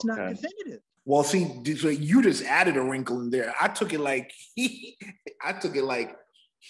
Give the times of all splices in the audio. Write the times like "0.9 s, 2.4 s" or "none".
1.0 s